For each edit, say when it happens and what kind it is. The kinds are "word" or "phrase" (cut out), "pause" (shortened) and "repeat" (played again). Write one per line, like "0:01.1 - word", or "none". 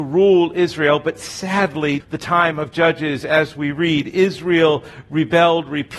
0:02.0 - word